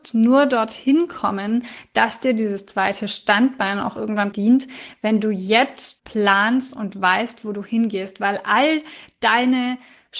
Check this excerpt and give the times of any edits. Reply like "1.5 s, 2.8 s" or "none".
4.3 s, 6.0 s